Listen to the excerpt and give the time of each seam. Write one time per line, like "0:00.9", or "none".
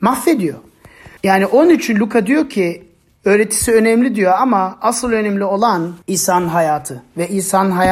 0:01.2
0:06.0

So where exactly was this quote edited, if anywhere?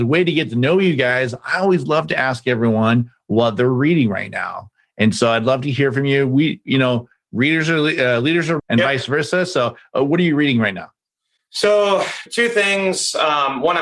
0:08.6
0:12.3

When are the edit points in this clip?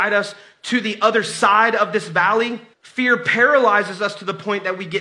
0:02.7

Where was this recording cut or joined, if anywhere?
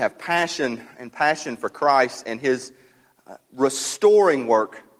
0:00.9

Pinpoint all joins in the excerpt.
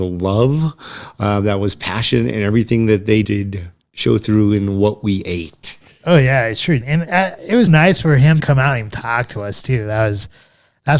0:03.2
0:06.8
0:07.7
0:08.4

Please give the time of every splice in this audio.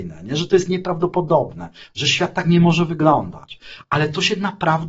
none

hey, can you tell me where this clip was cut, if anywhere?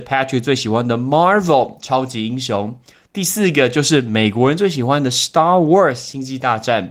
none

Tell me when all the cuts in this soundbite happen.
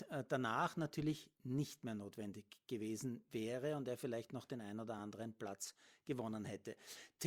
none

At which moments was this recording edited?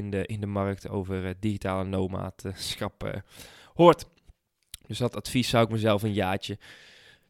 none

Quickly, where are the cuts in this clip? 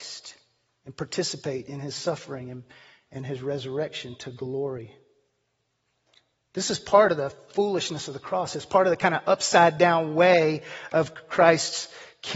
none

